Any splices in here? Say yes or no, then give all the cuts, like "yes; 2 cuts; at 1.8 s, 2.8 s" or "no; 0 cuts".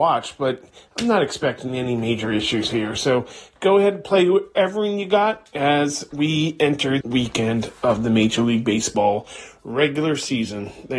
yes; 1 cut; at 7.0 s